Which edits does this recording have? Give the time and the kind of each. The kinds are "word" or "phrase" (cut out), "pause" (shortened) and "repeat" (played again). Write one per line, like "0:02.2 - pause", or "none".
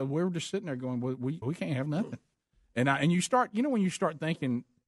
0:01.4 - word